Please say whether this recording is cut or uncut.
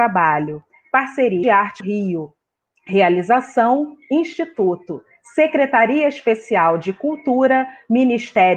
cut